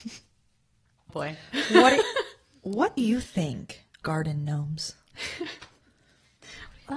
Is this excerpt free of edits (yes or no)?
no